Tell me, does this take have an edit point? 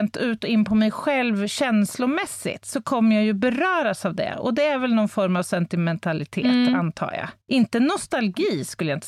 yes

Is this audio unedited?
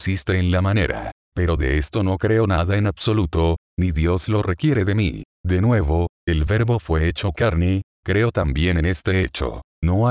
yes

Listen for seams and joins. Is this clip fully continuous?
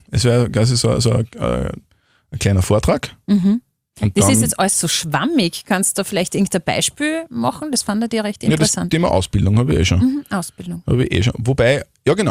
yes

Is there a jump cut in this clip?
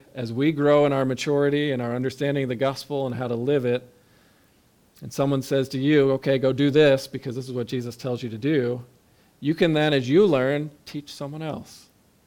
no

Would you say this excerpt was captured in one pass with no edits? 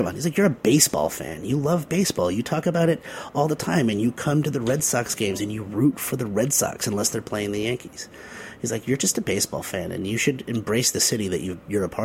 yes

